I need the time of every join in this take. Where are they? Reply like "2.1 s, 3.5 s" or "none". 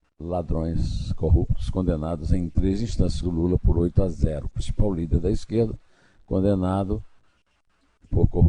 3.2 s

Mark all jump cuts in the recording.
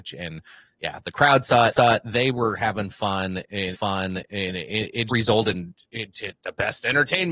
1.7 s, 3.7 s, 5.1 s

